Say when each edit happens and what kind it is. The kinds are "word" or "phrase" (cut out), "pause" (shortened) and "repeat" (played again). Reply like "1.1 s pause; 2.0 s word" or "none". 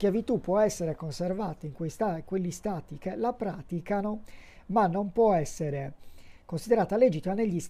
none